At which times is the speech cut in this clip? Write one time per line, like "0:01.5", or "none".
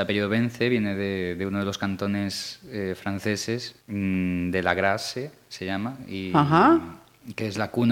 0:03.8